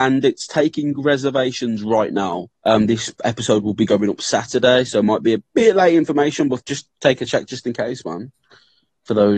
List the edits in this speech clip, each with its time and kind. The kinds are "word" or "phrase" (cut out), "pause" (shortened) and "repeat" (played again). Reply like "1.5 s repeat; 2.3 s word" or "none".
2.6 s pause; 3.2 s pause; 6.6 s word